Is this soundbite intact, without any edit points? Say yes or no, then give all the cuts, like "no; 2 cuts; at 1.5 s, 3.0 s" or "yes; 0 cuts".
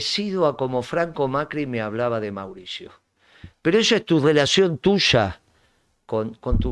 yes; 0 cuts